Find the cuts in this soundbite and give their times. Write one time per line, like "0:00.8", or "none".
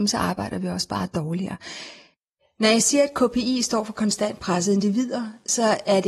none